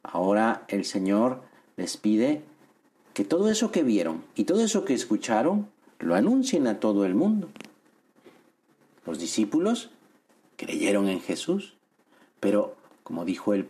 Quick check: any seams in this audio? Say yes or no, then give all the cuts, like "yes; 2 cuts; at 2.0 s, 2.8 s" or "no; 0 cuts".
no; 0 cuts